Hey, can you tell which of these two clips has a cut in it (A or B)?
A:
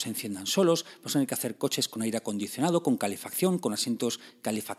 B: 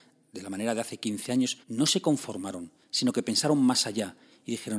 B